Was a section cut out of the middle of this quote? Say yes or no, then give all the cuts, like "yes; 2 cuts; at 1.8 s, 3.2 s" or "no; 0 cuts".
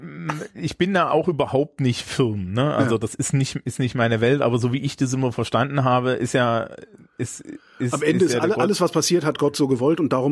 no; 0 cuts